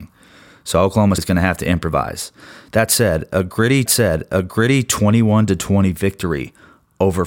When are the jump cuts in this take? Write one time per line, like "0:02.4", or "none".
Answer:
0:01.2
0:03.9